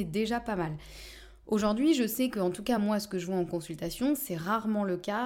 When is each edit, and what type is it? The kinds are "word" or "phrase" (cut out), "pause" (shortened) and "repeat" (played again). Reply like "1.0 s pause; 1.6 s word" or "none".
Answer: none